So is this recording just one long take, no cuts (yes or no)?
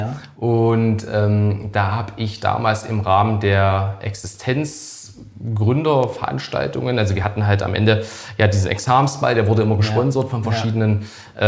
yes